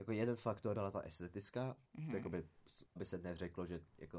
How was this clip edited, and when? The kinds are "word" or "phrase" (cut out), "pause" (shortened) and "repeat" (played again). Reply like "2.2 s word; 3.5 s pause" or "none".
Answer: 1.9 s pause; 2.9 s word